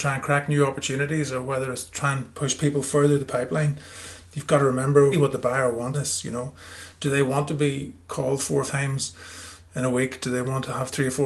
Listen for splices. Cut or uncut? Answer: cut